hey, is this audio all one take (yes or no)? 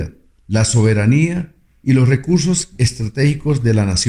yes